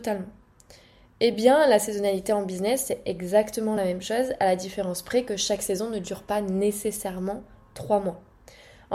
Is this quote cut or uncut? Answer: uncut